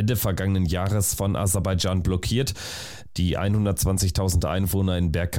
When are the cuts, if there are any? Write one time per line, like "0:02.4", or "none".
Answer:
none